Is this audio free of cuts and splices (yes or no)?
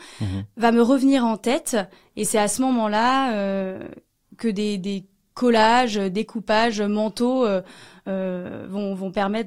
yes